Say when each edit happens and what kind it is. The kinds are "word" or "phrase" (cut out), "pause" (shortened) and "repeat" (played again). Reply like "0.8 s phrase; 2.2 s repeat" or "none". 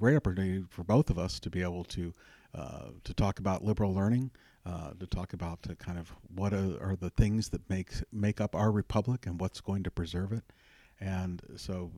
none